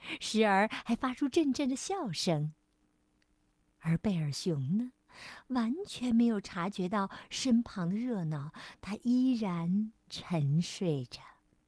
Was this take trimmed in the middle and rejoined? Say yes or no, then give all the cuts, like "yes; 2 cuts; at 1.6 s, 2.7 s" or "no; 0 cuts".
no; 0 cuts